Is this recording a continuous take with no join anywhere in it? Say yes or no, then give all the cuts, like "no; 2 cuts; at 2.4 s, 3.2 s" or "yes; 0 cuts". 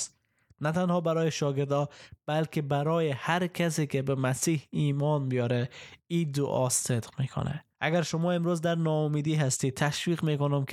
no; 1 cut; at 7.7 s